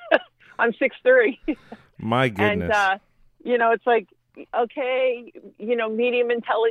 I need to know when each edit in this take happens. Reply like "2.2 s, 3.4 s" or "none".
4.5 s